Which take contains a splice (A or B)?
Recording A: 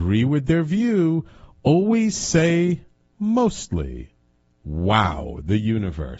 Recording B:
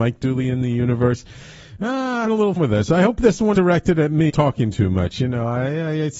B